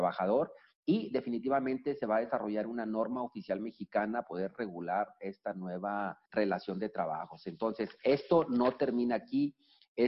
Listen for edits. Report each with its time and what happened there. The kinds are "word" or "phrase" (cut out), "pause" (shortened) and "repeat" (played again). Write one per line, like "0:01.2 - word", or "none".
0:04.2 - word
0:06.3 - pause